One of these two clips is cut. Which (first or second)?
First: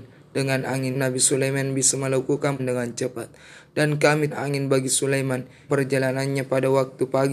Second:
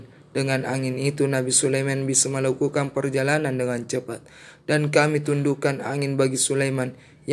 first